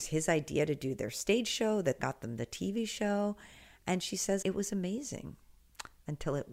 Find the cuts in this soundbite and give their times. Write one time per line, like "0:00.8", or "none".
0:02.0
0:04.4

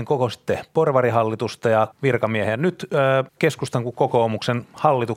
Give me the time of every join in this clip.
0:01.9
0:03.3

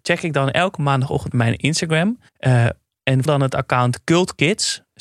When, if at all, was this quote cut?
0:01.3
0:02.3
0:03.3

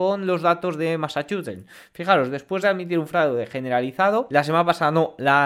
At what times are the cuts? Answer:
none

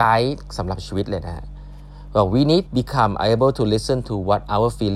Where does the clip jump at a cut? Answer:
0:02.7

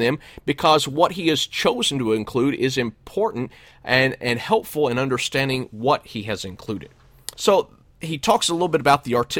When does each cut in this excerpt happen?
0:07.3

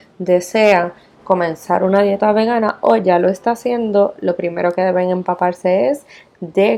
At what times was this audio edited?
0:01.2

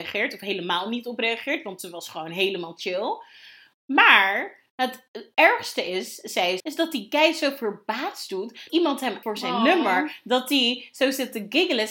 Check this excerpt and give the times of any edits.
0:06.6
0:08.7
0:09.2

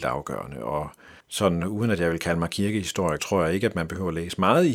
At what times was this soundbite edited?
0:01.2
0:03.2

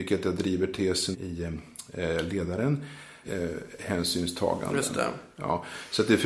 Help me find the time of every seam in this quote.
0:01.1
0:03.2

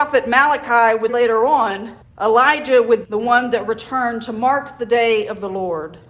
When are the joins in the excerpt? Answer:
0:01.1
0:02.0
0:03.0

